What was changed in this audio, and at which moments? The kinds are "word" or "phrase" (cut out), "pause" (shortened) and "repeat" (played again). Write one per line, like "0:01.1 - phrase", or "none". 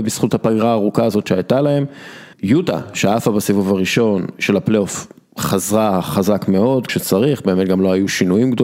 0:02.3 - pause
0:06.9 - word